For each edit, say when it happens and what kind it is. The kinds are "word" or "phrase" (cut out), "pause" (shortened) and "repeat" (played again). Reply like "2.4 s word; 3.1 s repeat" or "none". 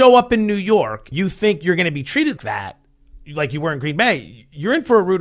1.1 s word; 2.4 s word